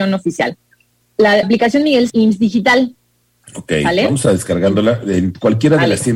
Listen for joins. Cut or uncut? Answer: cut